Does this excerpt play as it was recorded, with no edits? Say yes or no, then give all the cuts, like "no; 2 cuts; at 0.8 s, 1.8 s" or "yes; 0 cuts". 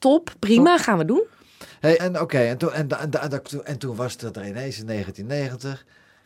no; 1 cut; at 2.0 s